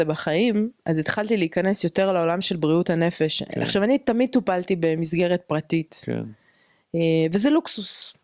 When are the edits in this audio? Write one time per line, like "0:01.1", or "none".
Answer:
none